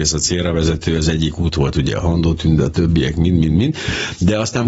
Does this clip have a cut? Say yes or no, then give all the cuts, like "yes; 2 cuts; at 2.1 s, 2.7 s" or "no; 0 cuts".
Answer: no; 0 cuts